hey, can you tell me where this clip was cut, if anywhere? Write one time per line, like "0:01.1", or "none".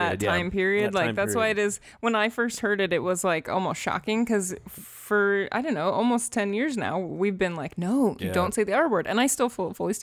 0:08.2